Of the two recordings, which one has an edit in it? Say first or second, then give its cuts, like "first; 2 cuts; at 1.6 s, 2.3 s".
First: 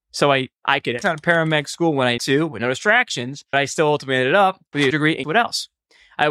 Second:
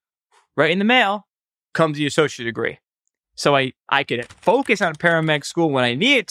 first; 5 cuts; at 1.0 s, 2.2 s, 3.5 s, 4.9 s, 5.2 s